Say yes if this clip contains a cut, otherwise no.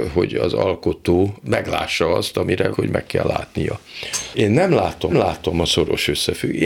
yes